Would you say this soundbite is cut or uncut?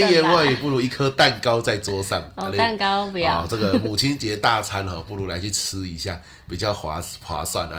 uncut